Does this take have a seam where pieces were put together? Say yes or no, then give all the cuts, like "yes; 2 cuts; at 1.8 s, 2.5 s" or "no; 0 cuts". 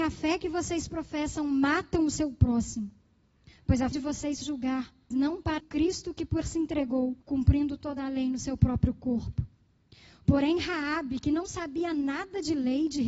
yes; 6 cuts; at 3.9 s, 4.4 s, 5.1 s, 5.6 s, 6.4 s, 7.2 s